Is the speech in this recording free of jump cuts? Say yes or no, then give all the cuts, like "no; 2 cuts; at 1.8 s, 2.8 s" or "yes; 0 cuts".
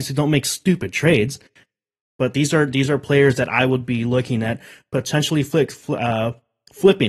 yes; 0 cuts